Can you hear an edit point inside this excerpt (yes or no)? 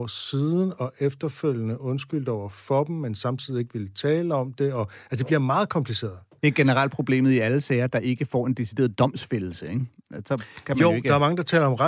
no